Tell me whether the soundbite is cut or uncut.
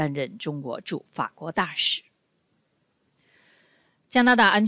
uncut